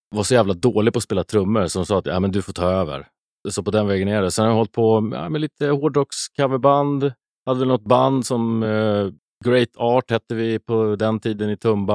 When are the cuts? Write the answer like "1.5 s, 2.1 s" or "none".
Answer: none